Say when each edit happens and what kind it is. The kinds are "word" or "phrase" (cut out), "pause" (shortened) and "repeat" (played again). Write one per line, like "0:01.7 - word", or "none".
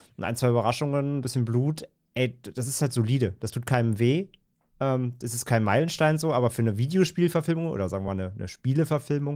none